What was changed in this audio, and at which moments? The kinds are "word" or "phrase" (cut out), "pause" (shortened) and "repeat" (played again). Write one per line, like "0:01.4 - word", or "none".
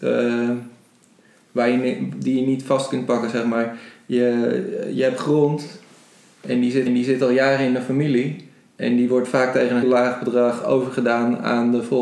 0:06.9 - repeat
0:09.8 - word